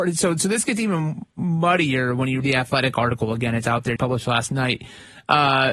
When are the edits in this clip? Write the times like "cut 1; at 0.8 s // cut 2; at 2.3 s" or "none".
cut 1; at 2.4 s // cut 2; at 4.0 s